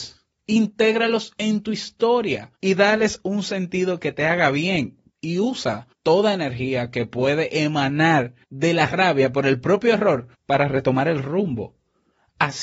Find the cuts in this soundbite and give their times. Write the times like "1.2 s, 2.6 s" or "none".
2.6 s, 5.1 s, 5.9 s, 8.4 s, 10.3 s